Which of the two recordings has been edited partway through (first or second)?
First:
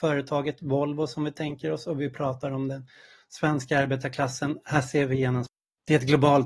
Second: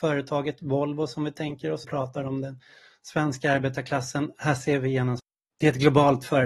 second